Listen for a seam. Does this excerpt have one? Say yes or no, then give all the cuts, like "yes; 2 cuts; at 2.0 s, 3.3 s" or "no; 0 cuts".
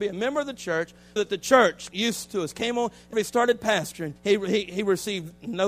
yes; 4 cuts; at 1.2 s, 1.9 s, 3.1 s, 4.2 s